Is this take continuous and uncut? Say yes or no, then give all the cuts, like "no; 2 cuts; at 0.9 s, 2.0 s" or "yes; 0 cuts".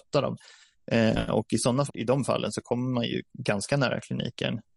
no; 1 cut; at 1.9 s